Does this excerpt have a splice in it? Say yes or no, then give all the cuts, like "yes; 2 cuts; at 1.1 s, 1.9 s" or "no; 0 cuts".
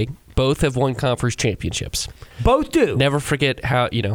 yes; 1 cut; at 2.3 s